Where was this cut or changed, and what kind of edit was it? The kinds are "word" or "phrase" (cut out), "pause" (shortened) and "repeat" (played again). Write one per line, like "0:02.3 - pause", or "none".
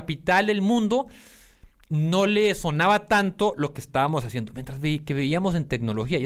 none